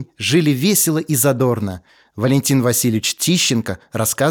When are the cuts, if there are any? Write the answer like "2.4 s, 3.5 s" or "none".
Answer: none